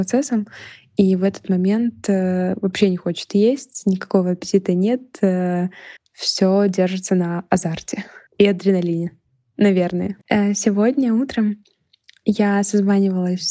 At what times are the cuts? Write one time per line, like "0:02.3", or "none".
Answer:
0:06.0
0:08.3
0:10.2